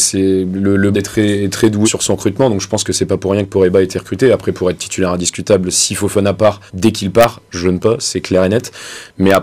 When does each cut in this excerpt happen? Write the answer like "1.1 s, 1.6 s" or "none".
0.9 s, 1.8 s, 6.7 s, 7.8 s